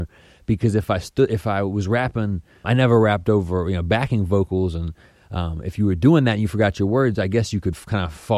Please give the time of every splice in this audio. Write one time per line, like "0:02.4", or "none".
0:02.6